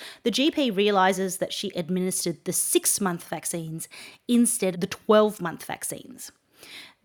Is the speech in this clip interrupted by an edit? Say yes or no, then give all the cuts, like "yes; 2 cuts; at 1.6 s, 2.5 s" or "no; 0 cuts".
yes; 2 cuts; at 1.7 s, 4.7 s